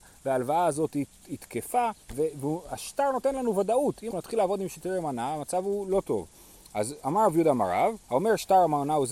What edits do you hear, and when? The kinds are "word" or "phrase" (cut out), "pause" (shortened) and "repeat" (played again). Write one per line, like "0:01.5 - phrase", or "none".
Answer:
0:02.0 - pause
0:04.1 - word
0:08.0 - pause

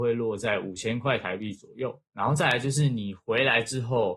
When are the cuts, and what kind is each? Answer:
0:02.1 - pause

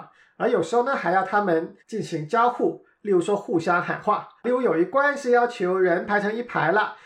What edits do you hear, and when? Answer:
0:01.8 - pause
0:04.4 - pause

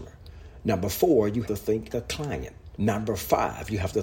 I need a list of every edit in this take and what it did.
0:01.4 - word
0:01.9 - word
0:02.7 - pause

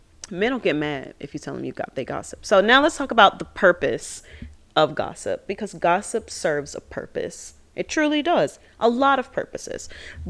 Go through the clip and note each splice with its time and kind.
none

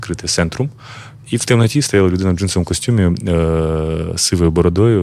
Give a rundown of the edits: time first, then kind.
none

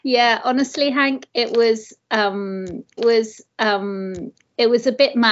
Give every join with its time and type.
0:03.0 - repeat

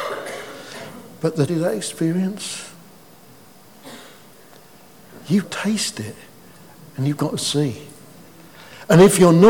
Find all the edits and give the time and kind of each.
0:01.5 - word
0:05.4 - word

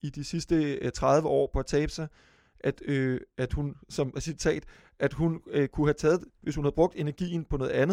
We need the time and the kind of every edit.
none

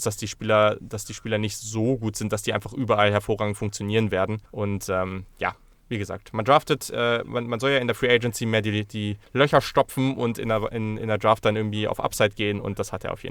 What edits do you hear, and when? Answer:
0:04.5 - pause
0:09.2 - pause

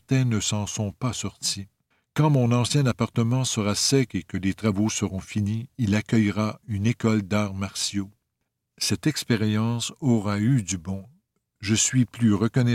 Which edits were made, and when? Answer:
0:01.9 - pause

